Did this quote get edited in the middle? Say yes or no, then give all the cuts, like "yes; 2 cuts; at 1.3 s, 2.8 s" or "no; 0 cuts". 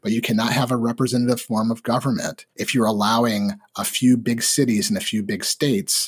yes; 1 cut; at 2.5 s